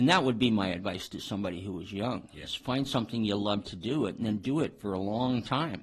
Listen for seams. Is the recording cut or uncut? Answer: uncut